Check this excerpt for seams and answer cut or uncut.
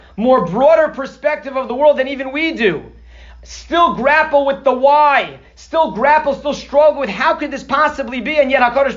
uncut